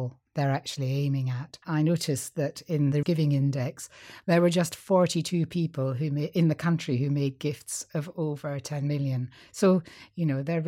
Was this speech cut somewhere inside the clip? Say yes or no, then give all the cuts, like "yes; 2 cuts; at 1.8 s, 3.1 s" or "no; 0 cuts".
yes; 2 cuts; at 1.6 s, 3.0 s